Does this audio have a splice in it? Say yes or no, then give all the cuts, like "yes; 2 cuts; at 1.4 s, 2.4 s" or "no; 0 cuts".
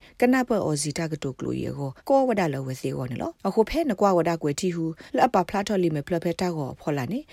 yes; 3 cuts; at 2.0 s, 3.4 s, 5.1 s